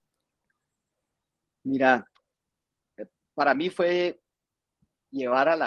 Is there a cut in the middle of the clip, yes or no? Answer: no